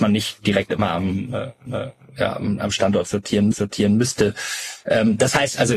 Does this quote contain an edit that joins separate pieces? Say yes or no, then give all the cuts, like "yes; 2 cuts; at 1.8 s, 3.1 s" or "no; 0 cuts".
yes; 2 cuts; at 1.7 s, 3.5 s